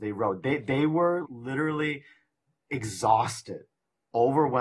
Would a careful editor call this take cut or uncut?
cut